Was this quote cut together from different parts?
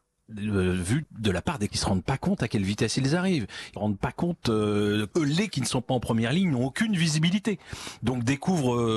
yes; 5 cuts; at 1.0 s, 1.7 s, 3.8 s, 5.1 s, 5.5 s

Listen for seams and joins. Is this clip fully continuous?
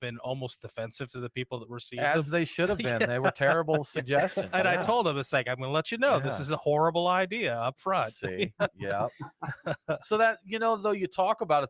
yes; 0 cuts

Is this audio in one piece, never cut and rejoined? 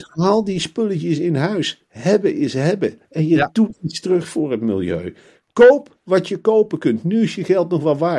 yes; 0 cuts

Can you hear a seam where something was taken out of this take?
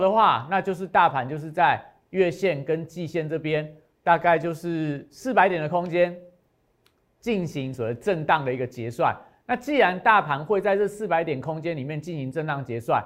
no; 0 cuts

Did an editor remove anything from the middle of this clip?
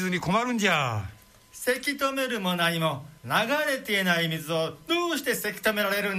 yes; 2 cuts; at 1.4 s, 3.2 s

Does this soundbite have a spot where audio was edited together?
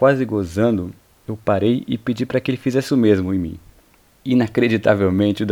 no; 0 cuts

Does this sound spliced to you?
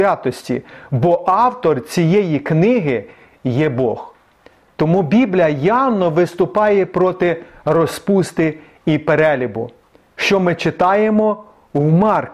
no; 0 cuts

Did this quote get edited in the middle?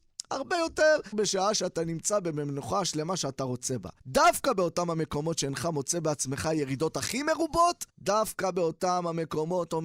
yes; 3 cuts; at 1.1 s, 4.0 s, 7.9 s

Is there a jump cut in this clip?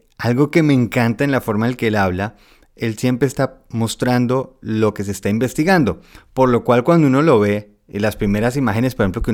no; 0 cuts

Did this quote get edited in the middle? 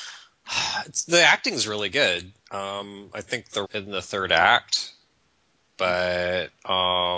yes; 2 cuts; at 2.4 s, 3.6 s

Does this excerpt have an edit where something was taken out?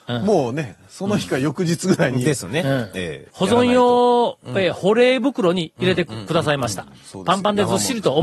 yes; 1 cut; at 3.3 s

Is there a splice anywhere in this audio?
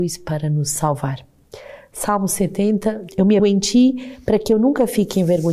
yes; 2 cuts; at 3.1 s, 3.4 s

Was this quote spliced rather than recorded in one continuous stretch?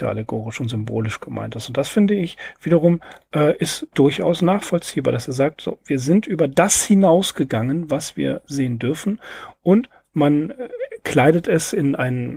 no; 0 cuts

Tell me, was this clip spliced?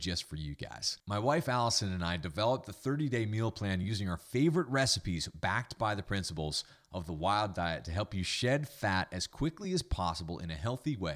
no; 0 cuts

